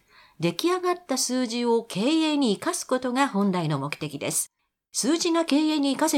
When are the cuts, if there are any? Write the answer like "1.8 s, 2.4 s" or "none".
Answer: 4.6 s